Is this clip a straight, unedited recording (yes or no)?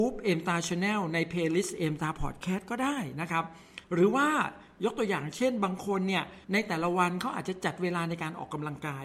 no